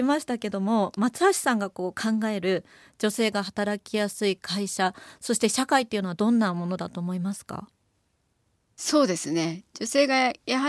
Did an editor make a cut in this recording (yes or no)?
no